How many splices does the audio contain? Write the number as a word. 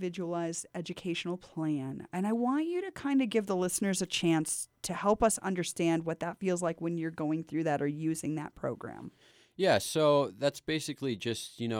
zero